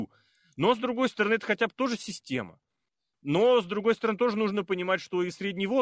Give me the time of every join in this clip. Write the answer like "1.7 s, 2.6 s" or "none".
none